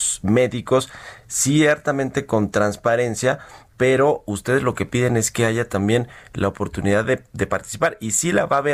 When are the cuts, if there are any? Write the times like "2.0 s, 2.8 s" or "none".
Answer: none